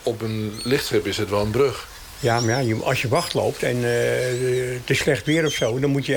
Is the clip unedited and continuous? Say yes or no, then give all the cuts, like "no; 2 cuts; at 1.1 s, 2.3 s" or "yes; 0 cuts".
yes; 0 cuts